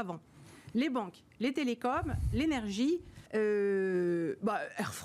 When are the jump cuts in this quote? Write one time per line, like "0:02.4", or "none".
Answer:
0:03.3